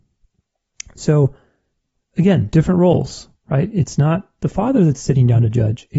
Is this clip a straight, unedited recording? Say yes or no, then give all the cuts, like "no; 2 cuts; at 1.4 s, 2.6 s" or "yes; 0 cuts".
yes; 0 cuts